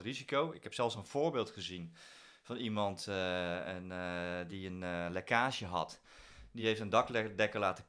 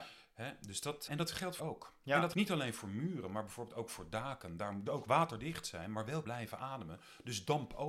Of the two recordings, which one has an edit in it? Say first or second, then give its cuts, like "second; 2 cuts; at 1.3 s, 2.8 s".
second; 5 cuts; at 1.1 s, 1.6 s, 2.3 s, 4.9 s, 6.2 s